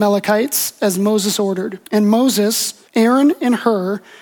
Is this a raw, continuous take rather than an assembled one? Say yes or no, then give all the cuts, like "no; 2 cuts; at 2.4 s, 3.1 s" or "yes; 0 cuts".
no; 2 cuts; at 1.9 s, 2.9 s